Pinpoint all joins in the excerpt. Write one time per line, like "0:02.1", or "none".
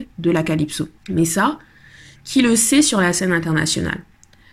0:01.0